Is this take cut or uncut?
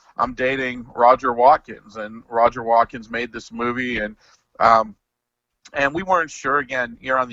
uncut